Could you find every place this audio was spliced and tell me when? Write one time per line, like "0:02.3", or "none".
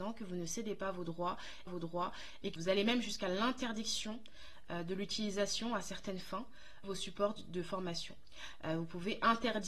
0:01.7
0:02.6
0:06.8